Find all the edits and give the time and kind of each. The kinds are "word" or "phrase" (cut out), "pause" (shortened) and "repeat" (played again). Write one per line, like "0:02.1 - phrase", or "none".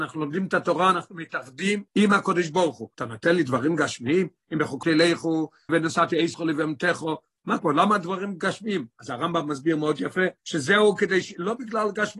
0:01.9 - pause
0:02.9 - pause
0:04.8 - word
0:05.7 - word
0:06.3 - word
0:07.6 - word
0:10.4 - pause